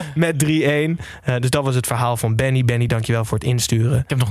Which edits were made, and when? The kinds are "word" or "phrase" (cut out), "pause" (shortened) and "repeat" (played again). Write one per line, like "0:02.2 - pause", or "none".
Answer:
none